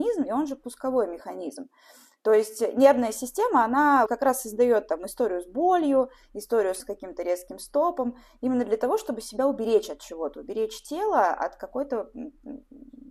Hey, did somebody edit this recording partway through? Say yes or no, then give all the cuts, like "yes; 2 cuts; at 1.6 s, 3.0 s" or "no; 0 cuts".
yes; 2 cuts; at 4.1 s, 6.8 s